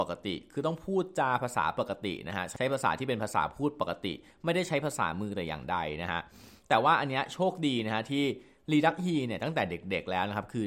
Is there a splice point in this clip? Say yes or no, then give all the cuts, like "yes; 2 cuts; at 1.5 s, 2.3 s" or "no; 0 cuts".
no; 0 cuts